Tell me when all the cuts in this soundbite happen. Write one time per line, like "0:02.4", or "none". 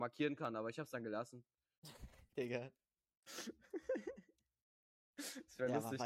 none